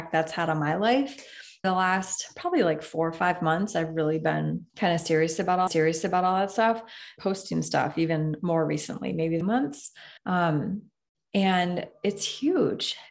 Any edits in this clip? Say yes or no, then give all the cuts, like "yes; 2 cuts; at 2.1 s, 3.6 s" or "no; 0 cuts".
yes; 6 cuts; at 1.6 s, 4.7 s, 5.7 s, 7.2 s, 9.4 s, 10.2 s